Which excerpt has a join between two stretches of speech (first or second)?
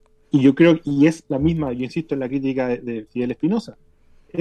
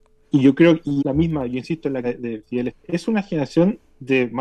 second